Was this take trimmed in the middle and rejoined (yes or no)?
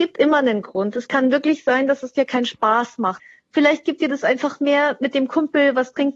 no